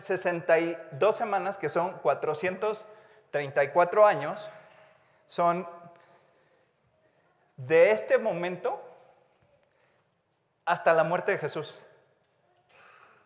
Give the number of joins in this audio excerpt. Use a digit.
0